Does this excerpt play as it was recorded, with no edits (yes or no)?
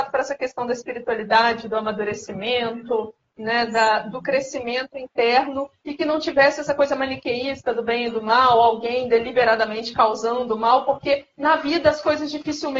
yes